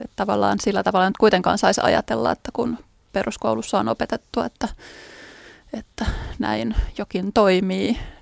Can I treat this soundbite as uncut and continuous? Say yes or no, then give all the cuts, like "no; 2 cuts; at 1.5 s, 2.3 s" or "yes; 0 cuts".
yes; 0 cuts